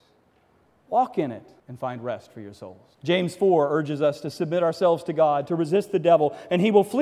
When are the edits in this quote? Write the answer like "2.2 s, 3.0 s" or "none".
1.6 s, 2.9 s